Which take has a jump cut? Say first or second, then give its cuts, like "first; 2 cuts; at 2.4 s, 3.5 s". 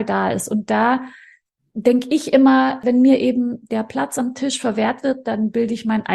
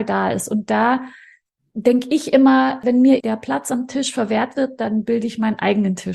second; 1 cut; at 3.2 s